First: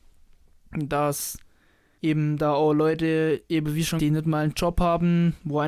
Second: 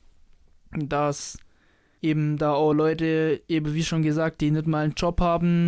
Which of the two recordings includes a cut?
first; 1 cut; at 4.0 s

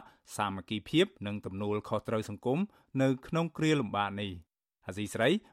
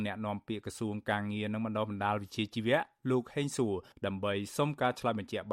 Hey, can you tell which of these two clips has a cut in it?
first; 1 cut; at 1.1 s

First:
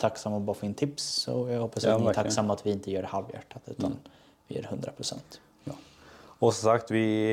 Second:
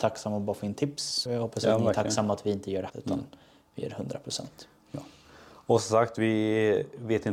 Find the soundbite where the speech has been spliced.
second; 2 cuts; at 1.3 s, 2.9 s

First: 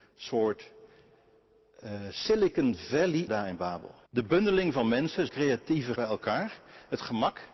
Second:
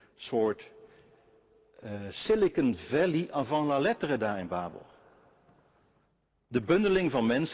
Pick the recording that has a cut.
first; 4 cuts; at 3.3 s, 4.1 s, 5.3 s, 6.0 s

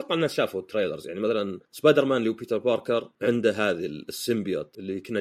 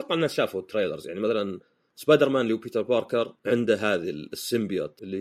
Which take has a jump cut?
first; 1 cut; at 1.7 s

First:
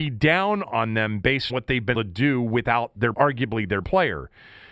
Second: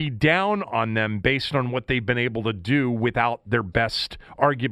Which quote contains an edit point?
first; 4 cuts; at 1.5 s, 1.9 s, 3.1 s, 3.8 s

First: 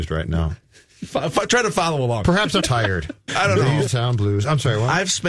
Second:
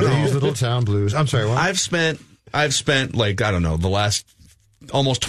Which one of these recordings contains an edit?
first; 3 cuts; at 2.6 s, 3.3 s, 3.9 s

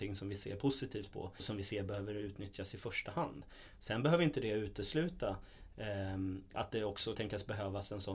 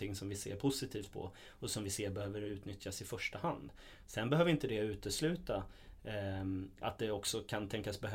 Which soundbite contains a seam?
first; 2 cuts; at 1.4 s, 7.1 s

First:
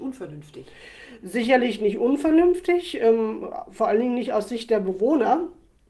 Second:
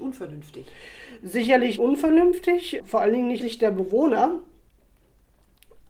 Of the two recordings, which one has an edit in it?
second; 3 cuts; at 1.8 s, 2.8 s, 3.4 s

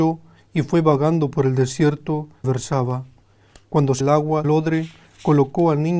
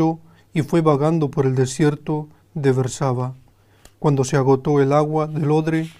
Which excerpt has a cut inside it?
first; 3 cuts; at 2.4 s, 4.0 s, 4.4 s

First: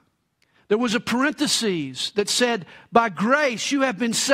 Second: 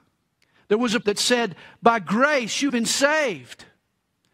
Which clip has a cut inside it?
second; 2 cuts; at 1.0 s, 2.7 s

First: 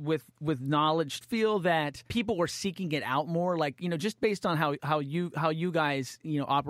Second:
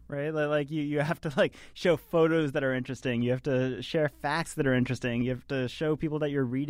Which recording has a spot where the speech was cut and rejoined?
first; 2 cuts; at 1.2 s, 2.1 s

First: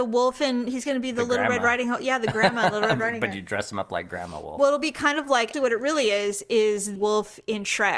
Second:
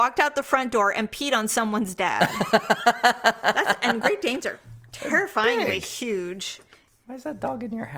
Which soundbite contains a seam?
first; 2 cuts; at 5.5 s, 7.0 s

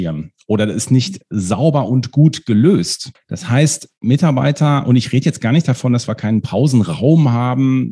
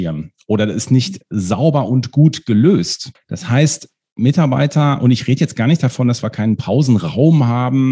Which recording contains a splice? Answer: first; 1 cut; at 3.9 s

